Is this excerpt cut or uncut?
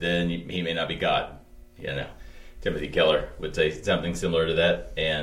uncut